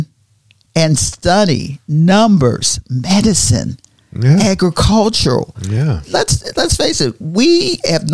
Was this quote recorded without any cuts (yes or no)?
yes